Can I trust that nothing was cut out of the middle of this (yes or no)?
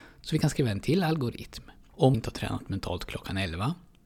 no